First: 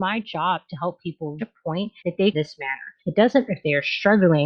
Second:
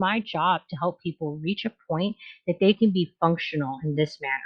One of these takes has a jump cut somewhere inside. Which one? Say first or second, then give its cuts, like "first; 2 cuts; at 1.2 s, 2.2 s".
first; 5 cuts; at 1.4 s, 2.0 s, 2.3 s, 3.0 s, 3.5 s